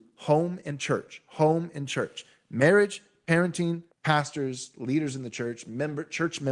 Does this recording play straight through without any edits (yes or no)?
no